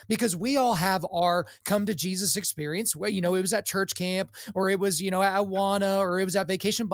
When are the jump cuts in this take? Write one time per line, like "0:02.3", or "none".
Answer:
none